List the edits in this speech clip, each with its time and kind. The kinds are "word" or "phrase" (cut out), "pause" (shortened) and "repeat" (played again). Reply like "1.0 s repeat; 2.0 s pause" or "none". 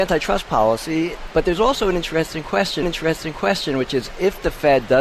2.8 s repeat